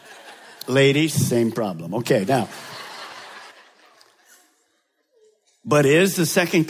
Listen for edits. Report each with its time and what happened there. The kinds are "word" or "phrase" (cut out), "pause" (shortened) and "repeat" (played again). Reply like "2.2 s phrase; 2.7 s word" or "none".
3.5 s pause